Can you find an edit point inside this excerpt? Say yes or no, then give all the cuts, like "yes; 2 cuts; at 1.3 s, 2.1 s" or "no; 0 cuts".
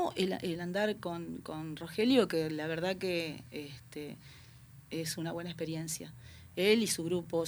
no; 0 cuts